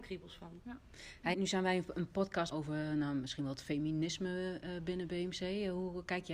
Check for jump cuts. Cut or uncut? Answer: cut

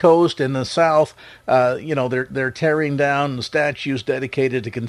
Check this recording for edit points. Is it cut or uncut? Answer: uncut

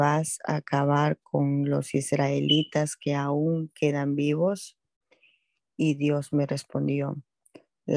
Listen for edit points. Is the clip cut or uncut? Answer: uncut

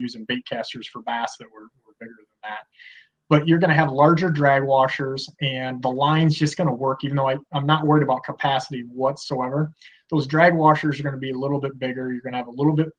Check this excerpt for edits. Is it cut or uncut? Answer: uncut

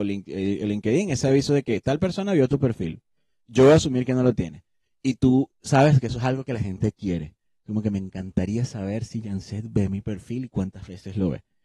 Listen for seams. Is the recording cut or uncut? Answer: uncut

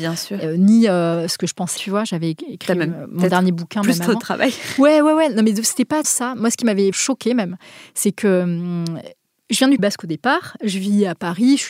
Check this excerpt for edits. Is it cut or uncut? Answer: cut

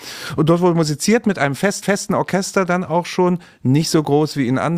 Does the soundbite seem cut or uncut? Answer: cut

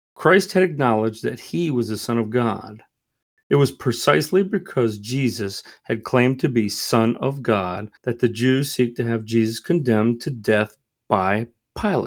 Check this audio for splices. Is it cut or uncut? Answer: cut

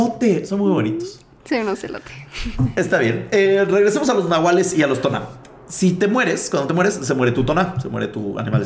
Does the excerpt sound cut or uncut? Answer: uncut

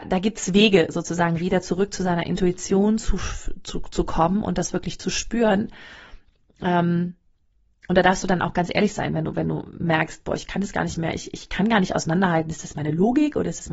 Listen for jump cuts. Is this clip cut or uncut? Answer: uncut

